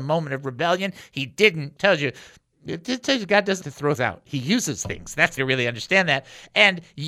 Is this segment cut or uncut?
cut